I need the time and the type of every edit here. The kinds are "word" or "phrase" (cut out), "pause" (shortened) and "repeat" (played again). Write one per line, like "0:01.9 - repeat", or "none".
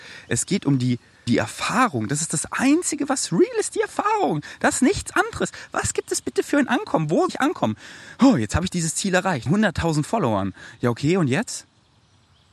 0:01.3 - word
0:07.3 - word
0:09.5 - word